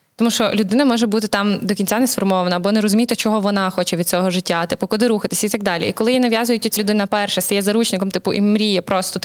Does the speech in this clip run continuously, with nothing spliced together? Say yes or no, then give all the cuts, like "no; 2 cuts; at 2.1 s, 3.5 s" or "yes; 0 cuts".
no; 1 cut; at 6.8 s